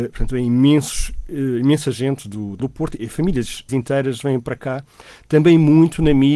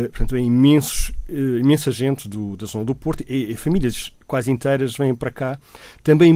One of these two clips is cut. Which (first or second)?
first